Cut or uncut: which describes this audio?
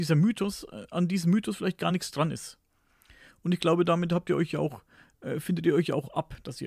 uncut